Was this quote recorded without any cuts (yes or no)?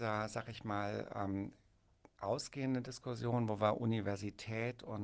yes